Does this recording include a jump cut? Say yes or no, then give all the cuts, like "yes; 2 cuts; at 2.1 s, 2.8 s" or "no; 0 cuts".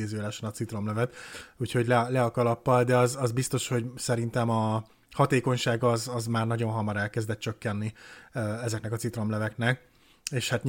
no; 0 cuts